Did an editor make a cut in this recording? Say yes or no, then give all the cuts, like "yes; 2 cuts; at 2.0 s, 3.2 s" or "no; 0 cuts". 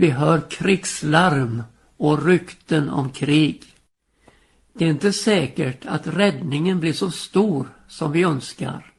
no; 0 cuts